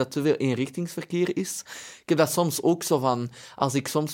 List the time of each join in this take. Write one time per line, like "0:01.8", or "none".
none